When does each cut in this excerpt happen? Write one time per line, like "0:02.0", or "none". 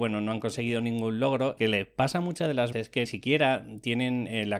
0:01.6
0:02.7
0:03.0